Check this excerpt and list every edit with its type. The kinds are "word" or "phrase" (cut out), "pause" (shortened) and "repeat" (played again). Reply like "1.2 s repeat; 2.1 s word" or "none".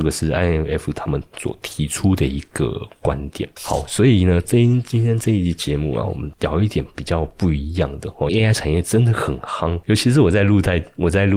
8.3 s phrase